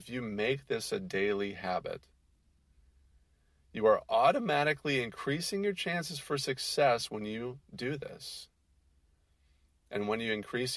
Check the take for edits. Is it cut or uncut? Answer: uncut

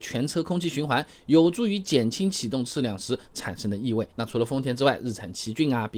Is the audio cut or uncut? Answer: cut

